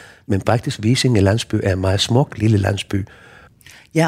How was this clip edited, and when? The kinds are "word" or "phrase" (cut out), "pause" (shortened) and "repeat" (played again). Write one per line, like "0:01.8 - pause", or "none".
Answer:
none